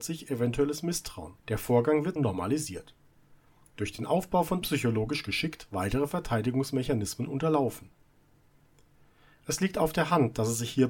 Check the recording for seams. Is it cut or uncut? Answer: cut